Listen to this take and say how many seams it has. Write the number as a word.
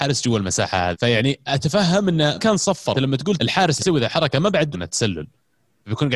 six